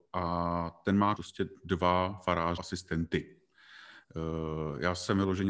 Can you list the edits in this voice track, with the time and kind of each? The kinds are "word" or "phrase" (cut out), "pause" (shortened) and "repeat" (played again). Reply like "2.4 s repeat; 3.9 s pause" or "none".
1.2 s phrase; 2.6 s word

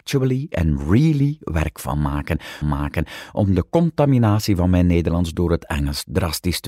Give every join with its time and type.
2.6 s repeat

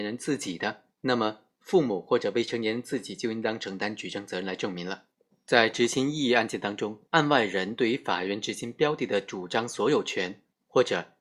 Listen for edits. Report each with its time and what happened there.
0.9 s pause; 5.3 s pause; 7.1 s pause

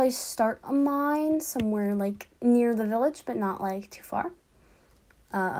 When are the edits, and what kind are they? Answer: 2.4 s pause

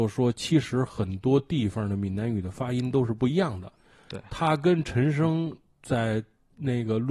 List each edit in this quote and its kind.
none

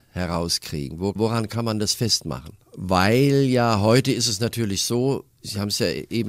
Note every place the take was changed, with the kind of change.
1.2 s phrase; 2.6 s pause; 5.3 s pause

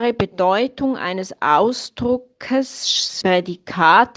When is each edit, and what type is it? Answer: 3.2 s word

